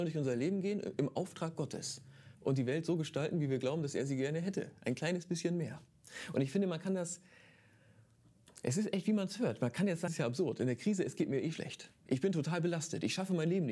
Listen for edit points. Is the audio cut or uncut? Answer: cut